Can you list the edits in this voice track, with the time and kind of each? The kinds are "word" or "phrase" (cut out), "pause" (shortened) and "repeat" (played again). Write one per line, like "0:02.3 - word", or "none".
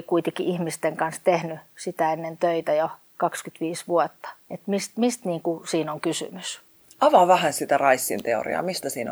0:03.1 - pause
0:04.4 - pause